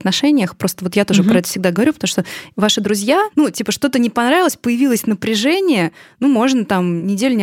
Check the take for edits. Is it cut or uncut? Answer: uncut